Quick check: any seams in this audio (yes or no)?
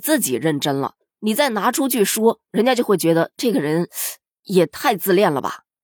no